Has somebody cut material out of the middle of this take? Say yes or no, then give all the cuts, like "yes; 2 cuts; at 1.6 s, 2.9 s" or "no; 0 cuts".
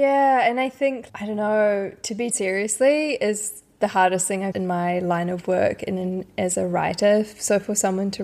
yes; 3 cuts; at 1.1 s, 2.3 s, 4.5 s